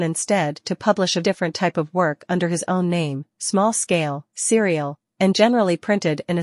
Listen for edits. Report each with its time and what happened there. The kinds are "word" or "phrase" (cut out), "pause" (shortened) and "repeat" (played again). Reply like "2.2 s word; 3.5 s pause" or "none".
1.2 s word